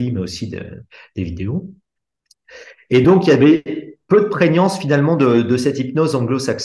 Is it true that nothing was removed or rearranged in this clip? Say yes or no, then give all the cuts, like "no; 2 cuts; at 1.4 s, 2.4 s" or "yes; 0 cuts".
yes; 0 cuts